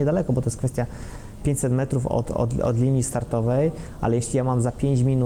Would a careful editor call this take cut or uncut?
uncut